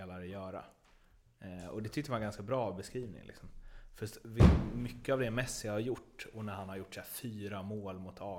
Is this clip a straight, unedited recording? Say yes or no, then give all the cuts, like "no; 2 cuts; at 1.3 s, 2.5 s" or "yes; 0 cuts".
yes; 0 cuts